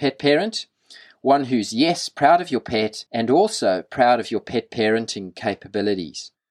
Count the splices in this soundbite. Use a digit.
1